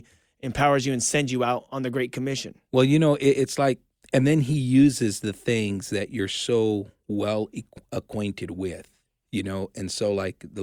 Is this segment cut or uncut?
uncut